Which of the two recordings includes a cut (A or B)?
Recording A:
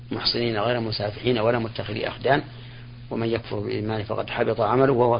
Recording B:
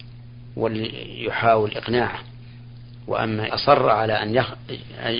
B